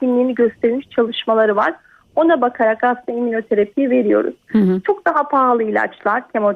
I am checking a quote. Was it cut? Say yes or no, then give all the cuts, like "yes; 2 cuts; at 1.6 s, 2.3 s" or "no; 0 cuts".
no; 0 cuts